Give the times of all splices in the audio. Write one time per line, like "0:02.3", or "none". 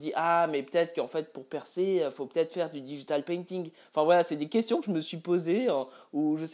none